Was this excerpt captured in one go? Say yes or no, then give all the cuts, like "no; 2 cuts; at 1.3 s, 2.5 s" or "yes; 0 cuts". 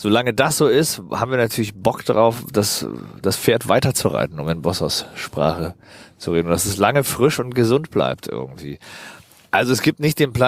yes; 0 cuts